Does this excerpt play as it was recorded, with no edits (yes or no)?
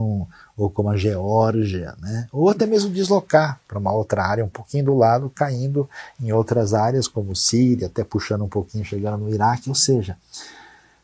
yes